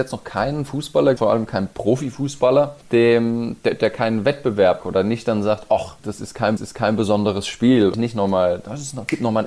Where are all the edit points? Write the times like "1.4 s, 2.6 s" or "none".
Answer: 1.2 s, 2.8 s, 4.8 s, 6.0 s, 6.6 s, 7.9 s